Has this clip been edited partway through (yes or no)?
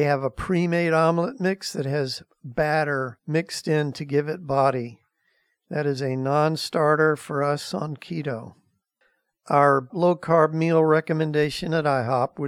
yes